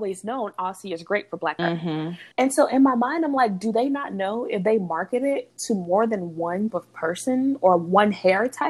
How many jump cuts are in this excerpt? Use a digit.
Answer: 3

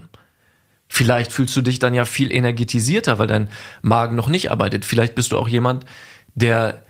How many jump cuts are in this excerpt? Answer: 0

